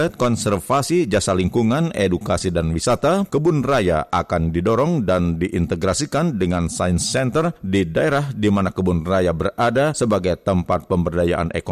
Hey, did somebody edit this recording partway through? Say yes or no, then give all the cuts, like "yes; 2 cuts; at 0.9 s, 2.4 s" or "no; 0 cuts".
yes; 1 cut; at 3.3 s